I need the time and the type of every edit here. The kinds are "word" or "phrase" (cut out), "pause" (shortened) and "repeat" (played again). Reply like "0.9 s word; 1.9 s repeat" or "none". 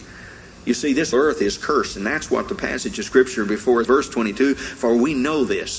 1.1 s word; 3.8 s word